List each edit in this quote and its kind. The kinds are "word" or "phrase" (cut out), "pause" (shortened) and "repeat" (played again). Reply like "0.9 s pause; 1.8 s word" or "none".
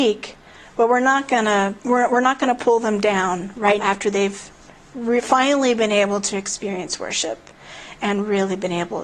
1.8 s pause; 3.8 s word